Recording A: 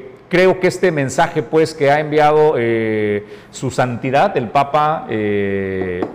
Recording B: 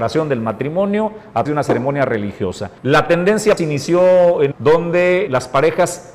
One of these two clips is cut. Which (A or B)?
B